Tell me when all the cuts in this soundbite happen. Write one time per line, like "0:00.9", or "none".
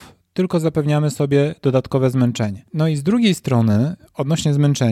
none